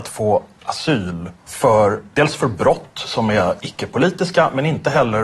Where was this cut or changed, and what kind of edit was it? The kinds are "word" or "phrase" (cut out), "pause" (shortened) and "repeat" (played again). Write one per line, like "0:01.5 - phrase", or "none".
0:01.4 - pause